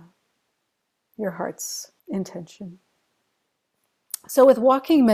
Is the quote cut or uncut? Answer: cut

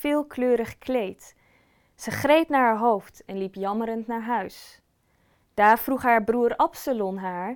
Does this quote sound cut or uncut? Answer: uncut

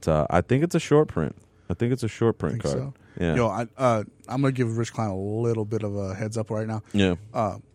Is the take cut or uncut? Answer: uncut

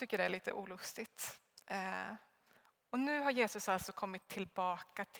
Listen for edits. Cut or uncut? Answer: uncut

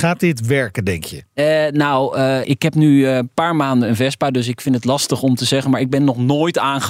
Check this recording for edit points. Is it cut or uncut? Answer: cut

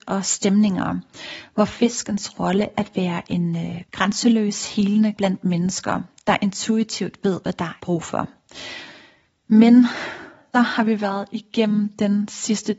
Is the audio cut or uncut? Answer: cut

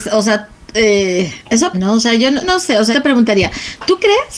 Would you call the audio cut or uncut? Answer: cut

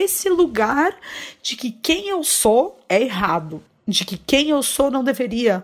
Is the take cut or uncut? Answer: uncut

